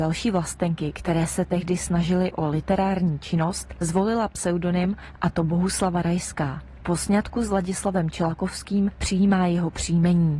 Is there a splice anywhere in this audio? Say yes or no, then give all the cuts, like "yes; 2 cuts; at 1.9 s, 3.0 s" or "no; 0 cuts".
no; 0 cuts